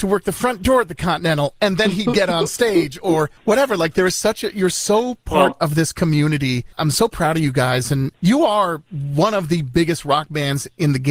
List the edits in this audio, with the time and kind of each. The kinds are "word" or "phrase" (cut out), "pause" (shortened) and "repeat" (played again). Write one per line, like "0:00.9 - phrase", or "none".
0:03.4 - pause

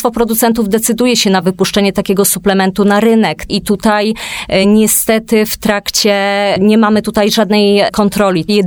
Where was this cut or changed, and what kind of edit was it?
none

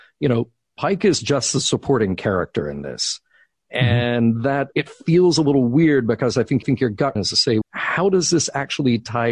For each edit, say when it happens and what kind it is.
0:04.7 - word
0:06.6 - repeat
0:07.2 - word
0:07.6 - word

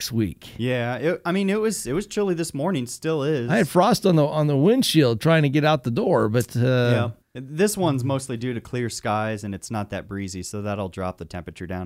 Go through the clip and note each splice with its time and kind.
0:07.2 - pause

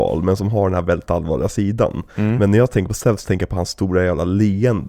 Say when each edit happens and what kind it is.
none

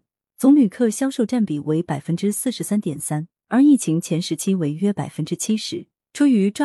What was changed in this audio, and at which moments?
0:03.4 - pause

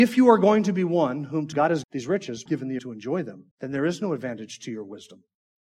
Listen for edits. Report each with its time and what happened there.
0:01.5 - word
0:01.8 - word
0:02.5 - phrase
0:02.8 - word
0:03.5 - pause

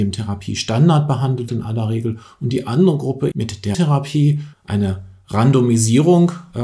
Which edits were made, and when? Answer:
0:01.5 - word
0:03.3 - word
0:03.7 - word
0:04.5 - word

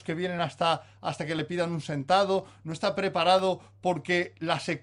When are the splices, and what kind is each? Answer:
none

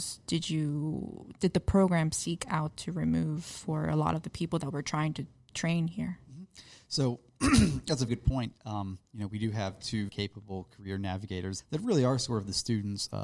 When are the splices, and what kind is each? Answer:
0:08.1 - word
0:10.1 - word
0:11.6 - word

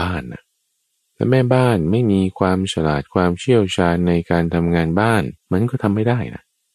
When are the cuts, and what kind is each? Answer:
0:05.4 - pause

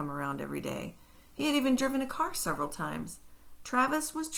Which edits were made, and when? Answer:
none

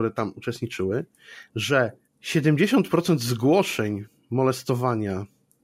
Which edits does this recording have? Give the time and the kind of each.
0:02.0 - pause

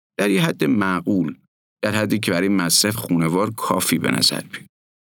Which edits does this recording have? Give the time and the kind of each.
0:02.9 - word

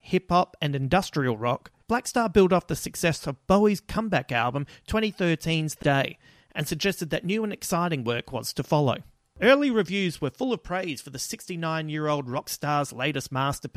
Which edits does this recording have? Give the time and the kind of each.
0:01.8 - pause
0:05.8 - word

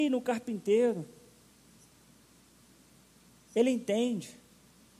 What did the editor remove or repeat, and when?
none

